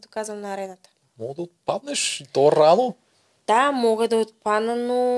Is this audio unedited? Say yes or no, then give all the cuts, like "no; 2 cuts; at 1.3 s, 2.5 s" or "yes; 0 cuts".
yes; 0 cuts